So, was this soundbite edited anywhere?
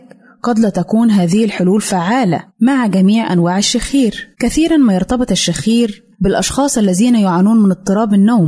yes; 3 cuts; at 2.5 s, 4.3 s, 6.1 s

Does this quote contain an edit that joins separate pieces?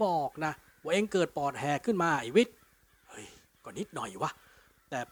no; 0 cuts

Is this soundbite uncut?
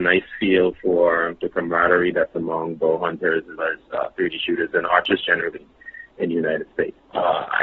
no; 1 cut; at 3.6 s

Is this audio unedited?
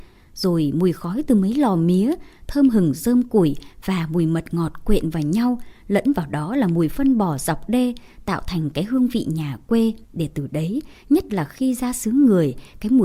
no; 1 cut; at 10.0 s

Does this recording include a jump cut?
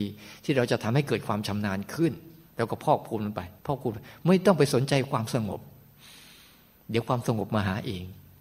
yes; 1 cut; at 3.6 s

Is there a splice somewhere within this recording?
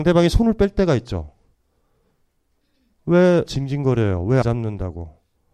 yes; 2 cuts; at 3.5 s, 4.4 s

